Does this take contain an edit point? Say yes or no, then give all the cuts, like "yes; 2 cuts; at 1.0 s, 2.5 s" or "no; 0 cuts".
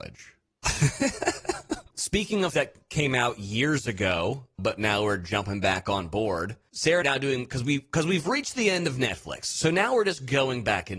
yes; 3 cuts; at 1.9 s, 2.5 s, 7.0 s